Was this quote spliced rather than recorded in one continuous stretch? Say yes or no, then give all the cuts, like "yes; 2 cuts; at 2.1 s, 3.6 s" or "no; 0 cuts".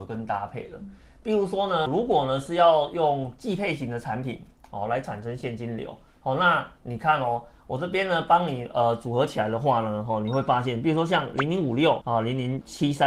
no; 0 cuts